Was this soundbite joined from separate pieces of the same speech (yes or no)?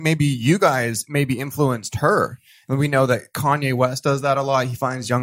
no